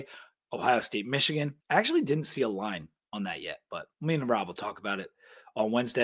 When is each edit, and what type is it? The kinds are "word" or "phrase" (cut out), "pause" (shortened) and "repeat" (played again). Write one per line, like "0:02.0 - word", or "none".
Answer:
0:01.6 - pause
0:03.9 - pause